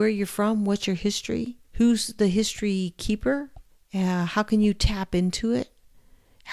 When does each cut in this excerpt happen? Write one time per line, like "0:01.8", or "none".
0:01.6
0:03.7